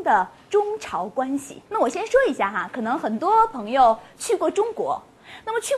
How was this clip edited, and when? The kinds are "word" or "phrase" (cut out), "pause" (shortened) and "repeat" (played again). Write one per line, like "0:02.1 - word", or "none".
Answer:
0:01.7 - pause